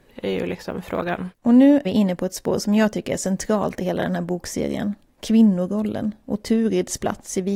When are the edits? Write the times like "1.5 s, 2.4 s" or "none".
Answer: 1.3 s, 1.8 s